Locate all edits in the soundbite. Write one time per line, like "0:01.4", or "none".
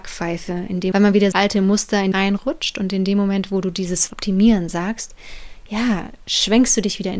0:00.9
0:01.3
0:02.1
0:04.1